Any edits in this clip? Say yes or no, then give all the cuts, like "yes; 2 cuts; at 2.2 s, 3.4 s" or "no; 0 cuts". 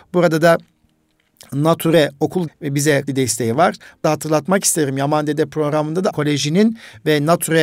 yes; 4 cuts; at 2.5 s, 3.1 s, 4.0 s, 6.1 s